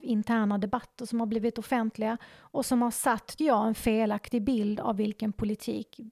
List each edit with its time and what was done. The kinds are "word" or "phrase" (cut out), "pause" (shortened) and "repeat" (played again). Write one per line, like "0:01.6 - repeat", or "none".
0:03.4 - word